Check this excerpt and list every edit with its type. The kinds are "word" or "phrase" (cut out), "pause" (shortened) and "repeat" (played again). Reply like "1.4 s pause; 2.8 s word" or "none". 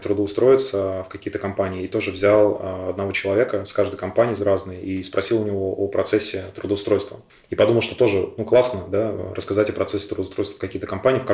none